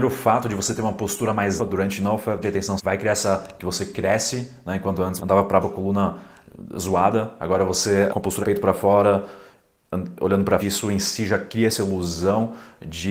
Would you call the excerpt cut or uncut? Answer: cut